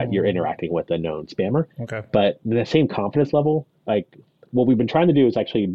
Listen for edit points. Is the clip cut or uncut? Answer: cut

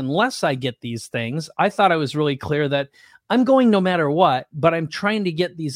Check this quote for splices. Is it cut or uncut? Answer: uncut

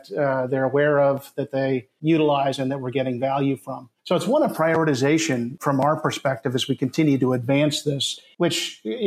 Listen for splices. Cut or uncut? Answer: cut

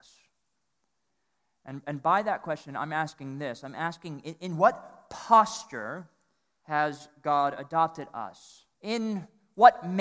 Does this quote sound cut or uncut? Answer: cut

